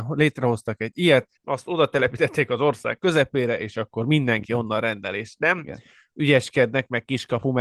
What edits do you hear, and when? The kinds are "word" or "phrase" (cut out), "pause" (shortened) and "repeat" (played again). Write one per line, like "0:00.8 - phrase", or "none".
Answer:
0:01.4 - pause